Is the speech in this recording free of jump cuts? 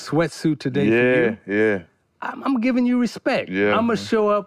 yes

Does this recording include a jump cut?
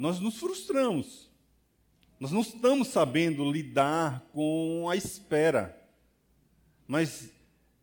no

